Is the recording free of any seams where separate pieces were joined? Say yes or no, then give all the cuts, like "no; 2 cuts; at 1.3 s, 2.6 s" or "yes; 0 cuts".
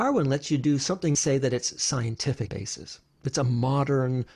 no; 2 cuts; at 1.1 s, 2.5 s